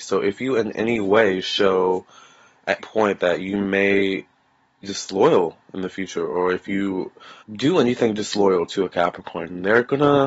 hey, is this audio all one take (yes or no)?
no